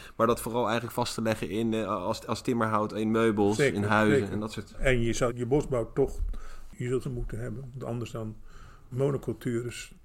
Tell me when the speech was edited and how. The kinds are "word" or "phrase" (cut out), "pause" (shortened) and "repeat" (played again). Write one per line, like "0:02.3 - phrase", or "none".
0:05.3 - word
0:07.0 - phrase
0:08.9 - word

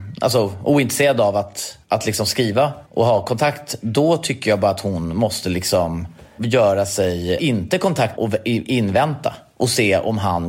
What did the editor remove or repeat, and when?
0:01.8 - pause
0:02.9 - pause
0:06.4 - word
0:07.4 - word
0:08.2 - word

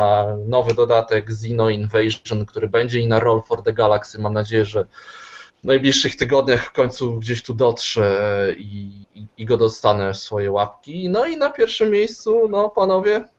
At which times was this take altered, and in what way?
0:05.5 - pause
0:09.0 - pause

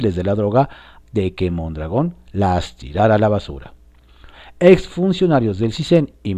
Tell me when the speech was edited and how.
0:01.0 - word

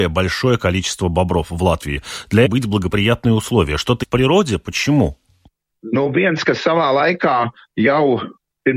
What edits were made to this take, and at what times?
0:02.4 - phrase
0:04.0 - word

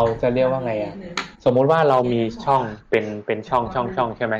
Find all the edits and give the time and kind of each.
0:01.3 - pause

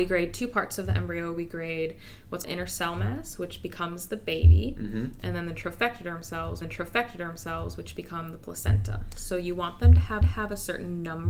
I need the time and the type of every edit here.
0:02.4 - word
0:06.6 - repeat
0:10.2 - repeat

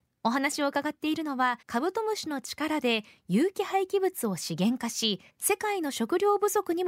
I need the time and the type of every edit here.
0:01.6 - pause
0:05.3 - pause

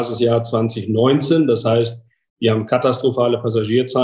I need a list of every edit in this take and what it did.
none

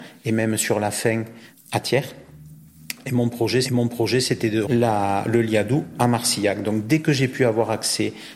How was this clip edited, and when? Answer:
0:01.5 - word
0:03.6 - repeat
0:04.6 - word

